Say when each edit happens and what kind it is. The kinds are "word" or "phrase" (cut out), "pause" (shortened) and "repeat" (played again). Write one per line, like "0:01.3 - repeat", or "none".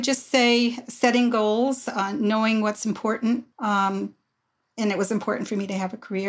0:03.5 - pause